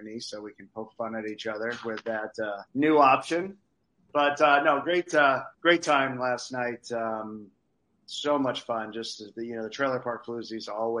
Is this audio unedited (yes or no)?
no